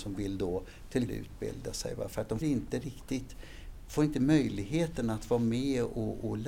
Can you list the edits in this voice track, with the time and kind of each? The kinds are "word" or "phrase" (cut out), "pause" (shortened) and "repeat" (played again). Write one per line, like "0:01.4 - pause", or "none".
0:01.1 - word
0:02.4 - word